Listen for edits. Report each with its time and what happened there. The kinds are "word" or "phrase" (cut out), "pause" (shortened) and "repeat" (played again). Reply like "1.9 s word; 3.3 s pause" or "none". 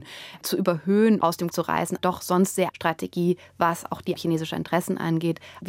1.2 s word; 1.5 s word; 2.0 s word; 2.7 s word; 4.2 s word